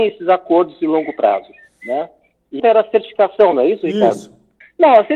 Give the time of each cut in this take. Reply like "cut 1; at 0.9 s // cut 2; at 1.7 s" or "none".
cut 1; at 2.6 s